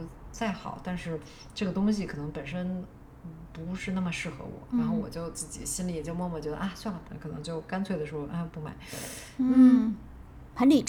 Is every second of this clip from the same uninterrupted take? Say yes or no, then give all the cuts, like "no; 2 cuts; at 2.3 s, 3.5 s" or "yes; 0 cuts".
no; 2 cuts; at 4.7 s, 7.0 s